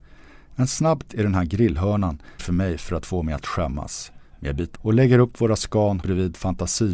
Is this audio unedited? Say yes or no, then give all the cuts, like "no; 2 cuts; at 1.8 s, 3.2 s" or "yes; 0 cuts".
no; 4 cuts; at 1.1 s, 2.4 s, 4.7 s, 6.0 s